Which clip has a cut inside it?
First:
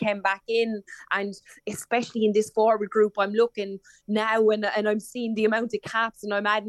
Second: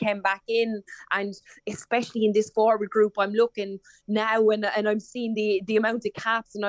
first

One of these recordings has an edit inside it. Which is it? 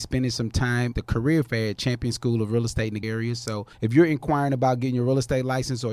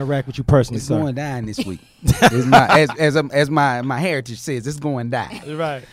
first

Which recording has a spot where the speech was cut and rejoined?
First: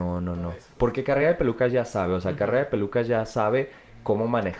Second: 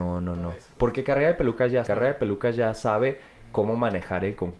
second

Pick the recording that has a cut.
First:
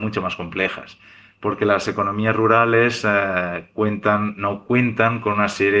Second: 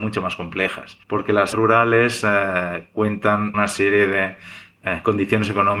second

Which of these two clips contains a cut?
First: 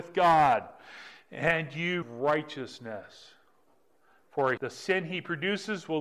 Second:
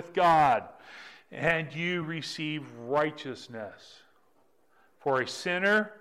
first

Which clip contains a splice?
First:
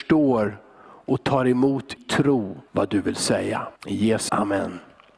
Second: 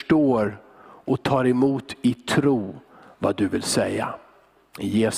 first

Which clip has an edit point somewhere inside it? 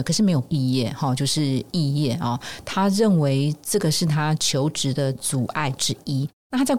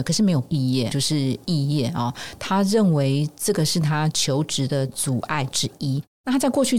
second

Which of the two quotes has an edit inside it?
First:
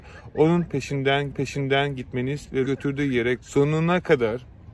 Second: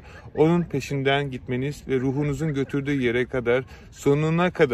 first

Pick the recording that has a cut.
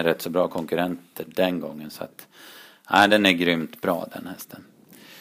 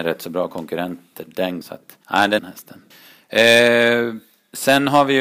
second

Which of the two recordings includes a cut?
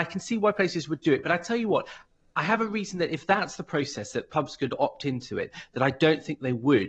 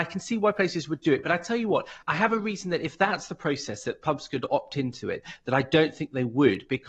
second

